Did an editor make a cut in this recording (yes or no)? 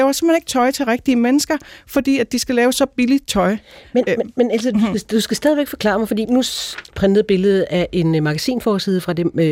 yes